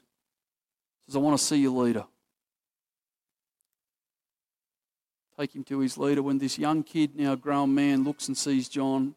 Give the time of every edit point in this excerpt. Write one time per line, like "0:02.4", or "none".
none